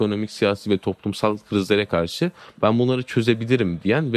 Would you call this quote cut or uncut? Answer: uncut